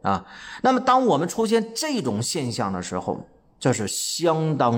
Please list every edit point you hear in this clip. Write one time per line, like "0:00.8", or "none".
none